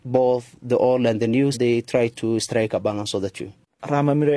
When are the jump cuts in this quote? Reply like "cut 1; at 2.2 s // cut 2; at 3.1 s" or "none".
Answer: cut 1; at 1.5 s